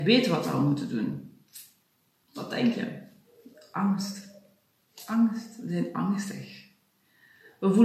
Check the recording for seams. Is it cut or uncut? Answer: uncut